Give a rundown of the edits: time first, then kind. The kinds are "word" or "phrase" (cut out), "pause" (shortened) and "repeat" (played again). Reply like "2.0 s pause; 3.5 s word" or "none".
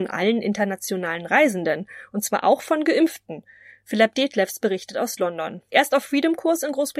none